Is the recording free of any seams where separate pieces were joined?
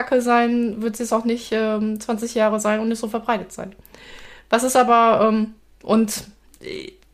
yes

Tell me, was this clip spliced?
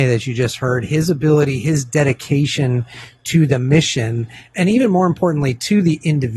no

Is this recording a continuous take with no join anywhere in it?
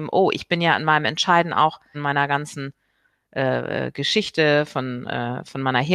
no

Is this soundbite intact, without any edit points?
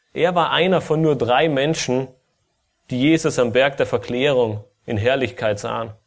yes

